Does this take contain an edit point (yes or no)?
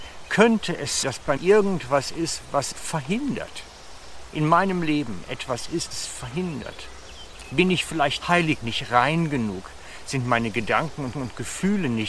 yes